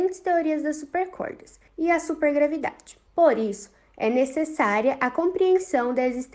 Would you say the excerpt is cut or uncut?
cut